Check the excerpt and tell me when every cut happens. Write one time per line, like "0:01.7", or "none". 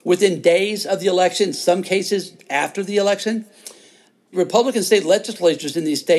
0:04.3